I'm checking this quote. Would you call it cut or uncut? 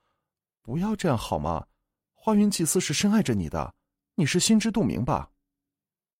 uncut